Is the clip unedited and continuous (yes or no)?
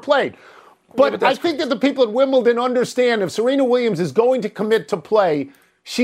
yes